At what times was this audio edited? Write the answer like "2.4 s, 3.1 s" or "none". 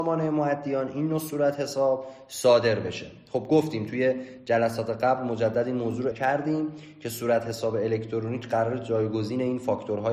6.1 s